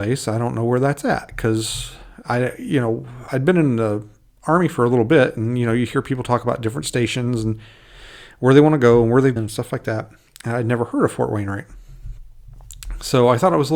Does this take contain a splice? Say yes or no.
yes